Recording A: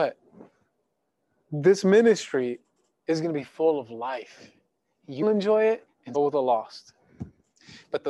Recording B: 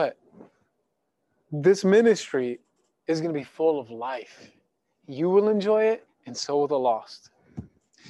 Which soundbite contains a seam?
A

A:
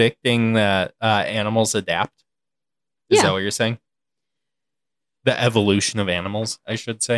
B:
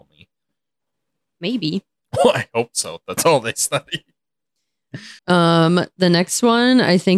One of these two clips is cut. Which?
B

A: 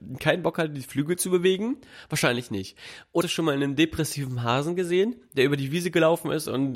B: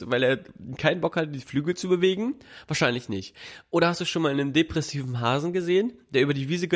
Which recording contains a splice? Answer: A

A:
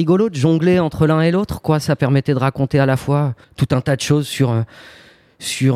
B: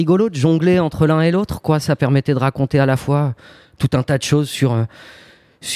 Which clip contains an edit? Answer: A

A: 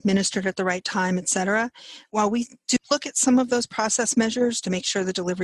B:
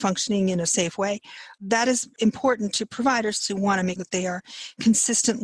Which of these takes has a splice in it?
B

